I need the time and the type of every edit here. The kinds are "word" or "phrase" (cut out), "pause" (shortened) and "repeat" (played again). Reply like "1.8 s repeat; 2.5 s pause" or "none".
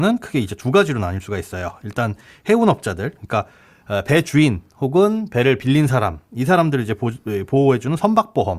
none